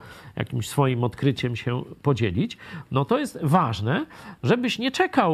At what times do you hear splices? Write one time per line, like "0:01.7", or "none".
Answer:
none